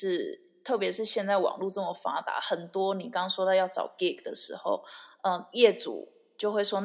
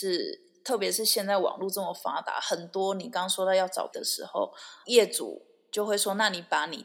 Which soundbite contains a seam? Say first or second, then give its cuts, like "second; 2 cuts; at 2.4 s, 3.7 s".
second; 2 cuts; at 3.9 s, 4.8 s